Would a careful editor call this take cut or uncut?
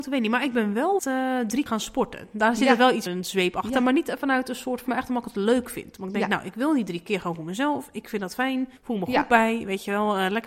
cut